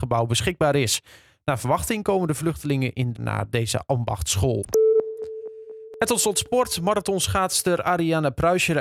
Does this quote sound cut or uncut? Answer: cut